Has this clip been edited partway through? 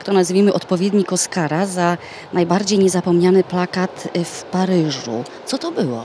no; 0 cuts

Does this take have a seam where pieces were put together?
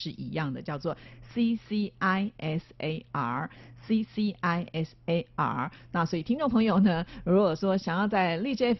no; 0 cuts

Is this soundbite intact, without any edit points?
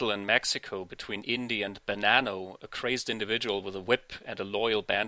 yes; 0 cuts

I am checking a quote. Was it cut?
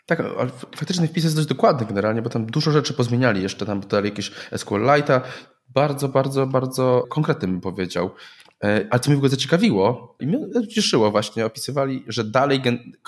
no; 0 cuts

